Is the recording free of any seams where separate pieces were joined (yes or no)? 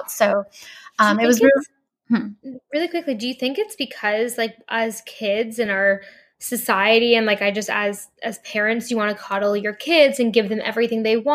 yes